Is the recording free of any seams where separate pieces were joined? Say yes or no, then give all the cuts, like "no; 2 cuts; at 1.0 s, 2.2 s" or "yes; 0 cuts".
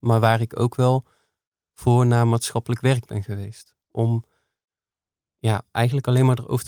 yes; 0 cuts